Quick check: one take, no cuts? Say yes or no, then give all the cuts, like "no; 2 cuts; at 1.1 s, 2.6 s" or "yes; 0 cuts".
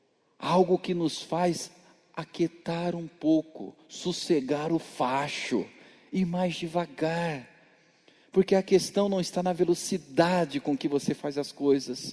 yes; 0 cuts